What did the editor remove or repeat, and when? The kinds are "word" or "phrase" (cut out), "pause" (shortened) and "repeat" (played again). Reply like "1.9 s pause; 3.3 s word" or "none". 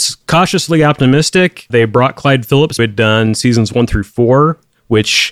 1.7 s word; 2.8 s phrase